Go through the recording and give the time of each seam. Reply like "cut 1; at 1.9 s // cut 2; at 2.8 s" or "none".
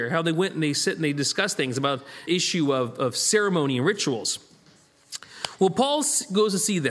cut 1; at 2.3 s